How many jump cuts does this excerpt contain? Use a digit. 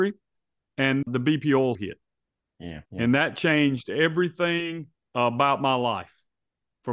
4